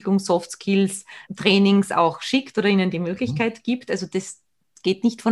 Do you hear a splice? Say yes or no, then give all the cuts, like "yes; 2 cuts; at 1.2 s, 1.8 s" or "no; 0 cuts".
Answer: yes; 1 cut; at 1.2 s